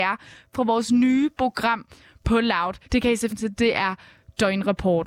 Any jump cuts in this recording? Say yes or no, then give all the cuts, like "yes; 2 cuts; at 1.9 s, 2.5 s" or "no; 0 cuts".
yes; 2 cuts; at 2.8 s, 3.3 s